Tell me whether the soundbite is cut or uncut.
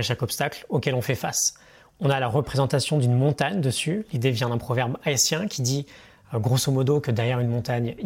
uncut